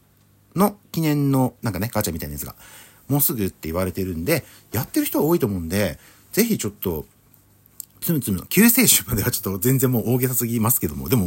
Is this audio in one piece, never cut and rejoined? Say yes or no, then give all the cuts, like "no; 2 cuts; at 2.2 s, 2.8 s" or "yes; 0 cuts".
yes; 0 cuts